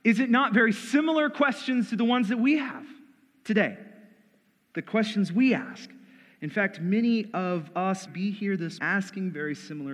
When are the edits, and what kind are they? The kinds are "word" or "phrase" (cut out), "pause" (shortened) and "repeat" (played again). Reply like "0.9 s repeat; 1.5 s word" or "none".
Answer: 8.1 s word; 8.8 s word